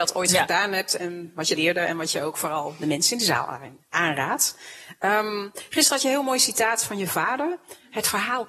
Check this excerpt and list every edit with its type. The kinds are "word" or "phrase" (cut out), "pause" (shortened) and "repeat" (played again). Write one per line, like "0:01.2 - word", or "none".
0:01.6 - word